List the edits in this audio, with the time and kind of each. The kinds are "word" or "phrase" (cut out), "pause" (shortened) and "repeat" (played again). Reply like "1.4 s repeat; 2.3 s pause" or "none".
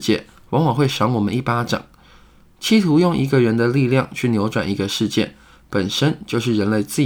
none